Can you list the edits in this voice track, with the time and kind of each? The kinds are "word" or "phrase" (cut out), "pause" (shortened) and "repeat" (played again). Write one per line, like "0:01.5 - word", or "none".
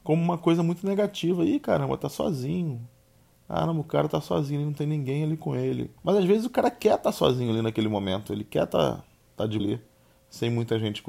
0:06.0 - pause
0:09.6 - word